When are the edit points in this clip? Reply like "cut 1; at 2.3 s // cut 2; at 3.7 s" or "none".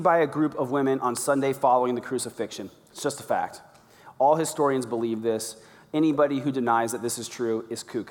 none